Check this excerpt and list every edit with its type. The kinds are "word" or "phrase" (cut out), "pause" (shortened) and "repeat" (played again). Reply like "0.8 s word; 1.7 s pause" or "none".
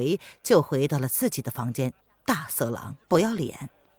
2.0 s pause; 3.0 s pause